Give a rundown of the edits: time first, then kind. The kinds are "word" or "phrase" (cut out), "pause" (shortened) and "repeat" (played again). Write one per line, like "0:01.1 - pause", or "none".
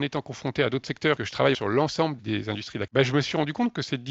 0:01.2 - word
0:01.5 - word
0:02.2 - word
0:02.9 - word